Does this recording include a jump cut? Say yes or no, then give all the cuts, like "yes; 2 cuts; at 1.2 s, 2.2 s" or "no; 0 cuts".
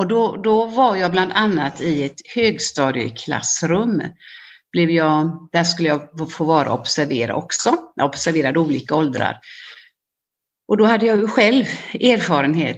no; 0 cuts